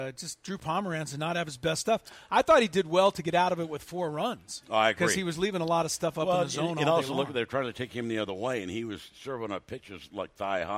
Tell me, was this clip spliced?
no; 0 cuts

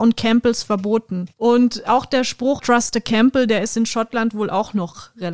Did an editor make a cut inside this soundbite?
yes; 2 cuts; at 1.3 s, 2.6 s

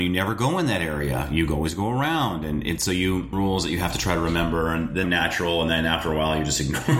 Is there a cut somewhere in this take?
yes; 2 cuts; at 3.3 s, 5.0 s

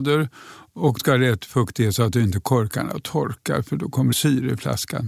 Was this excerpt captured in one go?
no; 2 cuts; at 1.0 s, 4.1 s

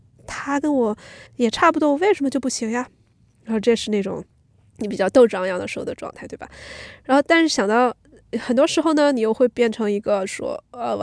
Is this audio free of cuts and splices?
no; 1 cut; at 1.3 s

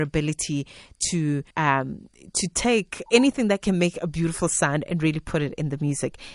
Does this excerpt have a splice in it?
yes; 2 cuts; at 1.5 s, 3.1 s

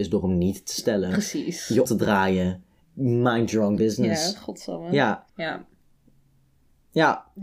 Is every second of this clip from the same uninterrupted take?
no; 4 cuts; at 1.8 s, 2.8 s, 3.8 s, 5.3 s

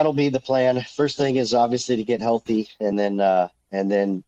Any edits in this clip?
no; 0 cuts

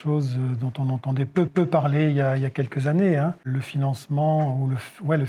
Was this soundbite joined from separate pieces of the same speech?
yes; 1 cut; at 1.5 s

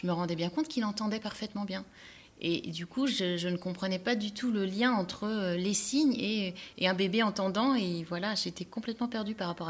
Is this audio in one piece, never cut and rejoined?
yes; 0 cuts

